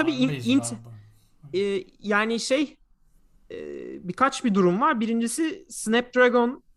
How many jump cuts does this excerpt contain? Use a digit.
0